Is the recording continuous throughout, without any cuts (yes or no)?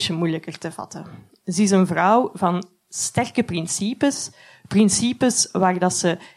yes